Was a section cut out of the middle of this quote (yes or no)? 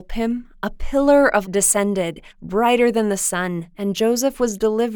yes